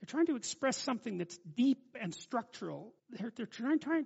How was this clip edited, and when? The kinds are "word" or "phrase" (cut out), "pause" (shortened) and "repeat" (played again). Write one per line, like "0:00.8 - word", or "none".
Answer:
0:03.0 - pause